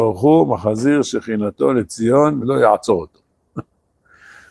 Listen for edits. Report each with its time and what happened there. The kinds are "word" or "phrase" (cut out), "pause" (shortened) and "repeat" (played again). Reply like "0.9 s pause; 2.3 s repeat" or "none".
2.4 s phrase